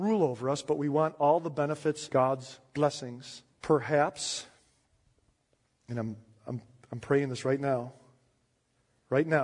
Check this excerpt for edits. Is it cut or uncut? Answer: cut